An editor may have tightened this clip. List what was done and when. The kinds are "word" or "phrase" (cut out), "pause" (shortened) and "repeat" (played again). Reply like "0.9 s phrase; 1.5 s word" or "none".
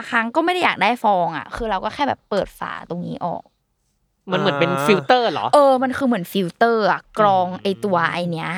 none